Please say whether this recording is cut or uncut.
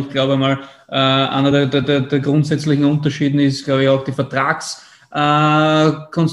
uncut